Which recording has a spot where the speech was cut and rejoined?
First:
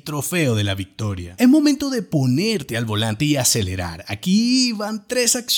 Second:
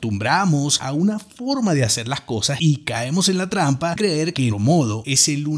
second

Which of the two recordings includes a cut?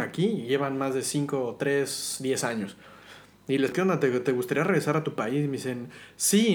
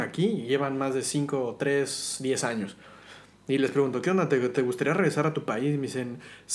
first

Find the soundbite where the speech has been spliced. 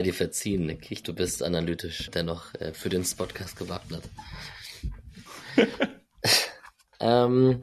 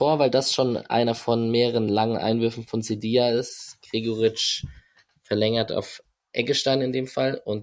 first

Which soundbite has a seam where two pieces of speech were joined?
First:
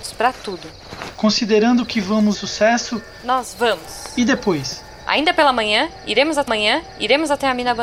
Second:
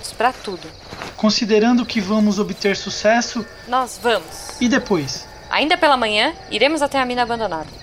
first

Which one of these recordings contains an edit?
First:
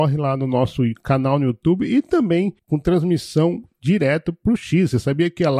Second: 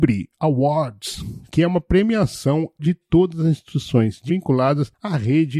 second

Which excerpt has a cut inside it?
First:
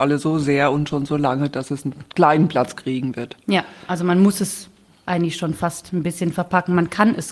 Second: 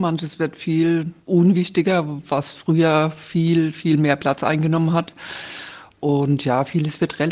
second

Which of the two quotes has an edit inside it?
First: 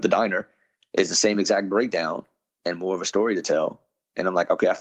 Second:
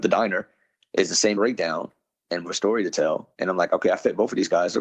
second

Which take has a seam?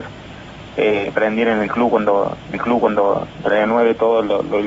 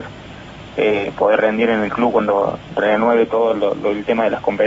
first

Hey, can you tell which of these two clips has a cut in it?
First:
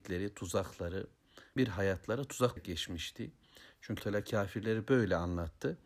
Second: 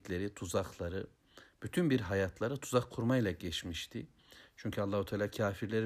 first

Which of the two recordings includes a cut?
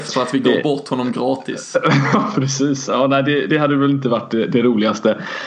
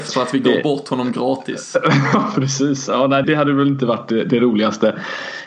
second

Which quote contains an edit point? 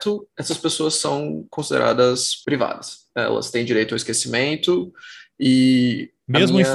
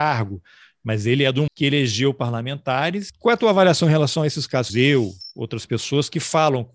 second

